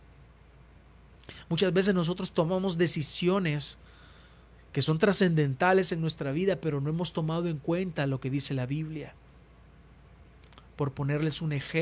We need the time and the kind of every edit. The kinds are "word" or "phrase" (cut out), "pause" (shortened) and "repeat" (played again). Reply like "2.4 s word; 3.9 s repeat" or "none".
none